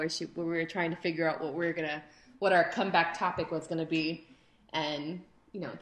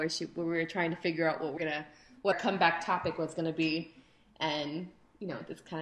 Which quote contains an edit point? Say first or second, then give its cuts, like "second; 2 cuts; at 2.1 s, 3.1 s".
second; 2 cuts; at 1.6 s, 2.3 s